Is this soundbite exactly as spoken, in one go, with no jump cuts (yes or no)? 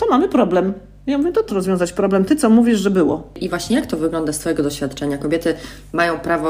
no